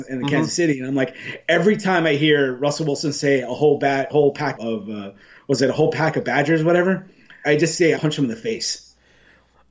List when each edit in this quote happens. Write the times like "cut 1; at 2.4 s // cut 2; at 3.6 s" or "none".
cut 1; at 4.1 s // cut 2; at 4.6 s // cut 3; at 7.4 s // cut 4; at 8.0 s

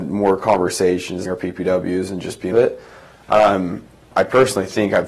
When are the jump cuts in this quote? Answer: cut 1; at 1.2 s // cut 2; at 2.5 s

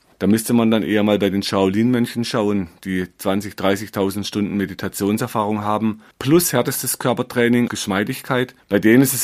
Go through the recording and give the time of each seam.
cut 1; at 6.1 s // cut 2; at 7.7 s

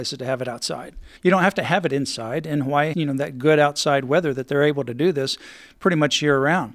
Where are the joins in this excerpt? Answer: cut 1; at 1.2 s // cut 2; at 2.9 s

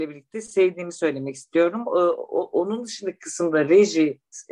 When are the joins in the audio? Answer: none

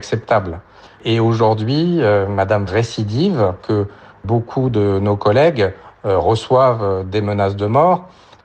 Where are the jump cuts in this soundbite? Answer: cut 1; at 2.7 s // cut 2; at 3.6 s

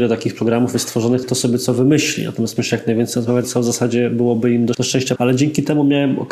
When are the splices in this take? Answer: cut 1; at 1.2 s // cut 2; at 2.6 s // cut 3; at 3.4 s // cut 4; at 4.7 s // cut 5; at 5.2 s

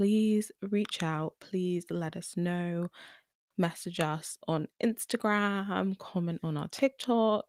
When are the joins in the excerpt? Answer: none

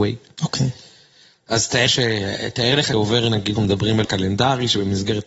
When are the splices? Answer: cut 1; at 1.9 s // cut 2; at 2.9 s // cut 3; at 3.6 s // cut 4; at 4.0 s

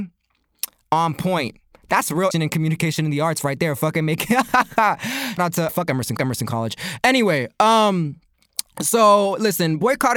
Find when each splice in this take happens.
cut 1; at 2.3 s // cut 2; at 5.4 s // cut 3; at 5.7 s // cut 4; at 6.2 s

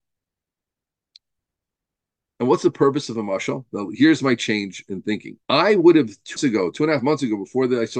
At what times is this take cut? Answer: cut 1; at 5.4 s // cut 2; at 6.4 s

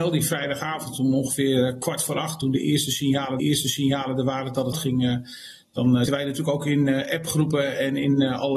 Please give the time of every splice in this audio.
cut 1; at 3.4 s // cut 2; at 4.7 s // cut 3; at 6.1 s

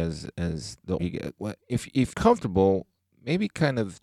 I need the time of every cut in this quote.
cut 1; at 1.0 s // cut 2; at 1.6 s // cut 3; at 2.1 s

